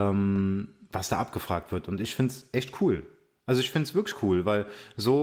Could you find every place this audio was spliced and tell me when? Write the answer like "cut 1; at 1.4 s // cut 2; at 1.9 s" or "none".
none